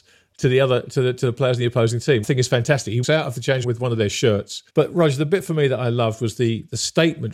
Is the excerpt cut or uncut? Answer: cut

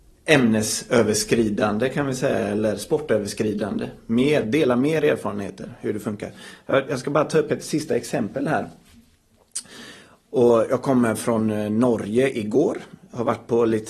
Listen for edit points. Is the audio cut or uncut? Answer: uncut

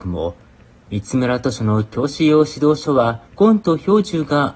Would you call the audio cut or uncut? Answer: cut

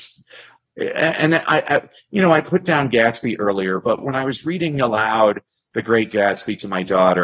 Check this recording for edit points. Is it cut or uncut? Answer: uncut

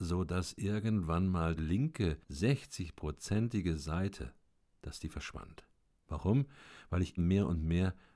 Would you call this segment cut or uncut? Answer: cut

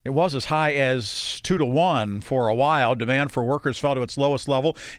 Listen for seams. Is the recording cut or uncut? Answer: uncut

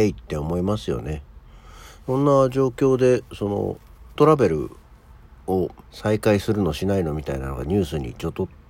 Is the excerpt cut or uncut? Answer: cut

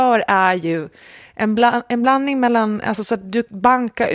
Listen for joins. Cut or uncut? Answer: uncut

